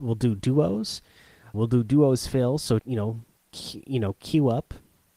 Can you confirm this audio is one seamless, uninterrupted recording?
no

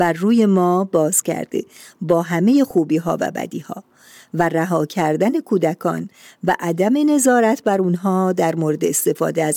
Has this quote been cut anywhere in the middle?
no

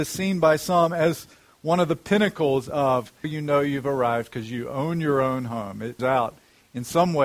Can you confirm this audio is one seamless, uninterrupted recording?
no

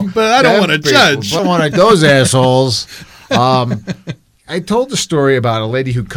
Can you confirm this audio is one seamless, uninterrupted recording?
no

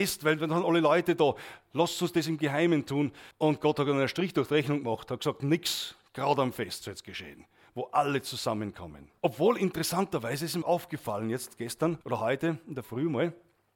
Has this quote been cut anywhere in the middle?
yes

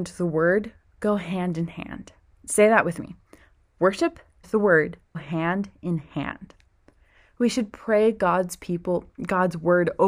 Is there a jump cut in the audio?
yes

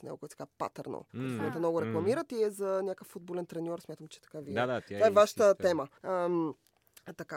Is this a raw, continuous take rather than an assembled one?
no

